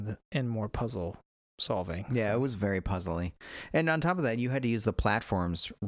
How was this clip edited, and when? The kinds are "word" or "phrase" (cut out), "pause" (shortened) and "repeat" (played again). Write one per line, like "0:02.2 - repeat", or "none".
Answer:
none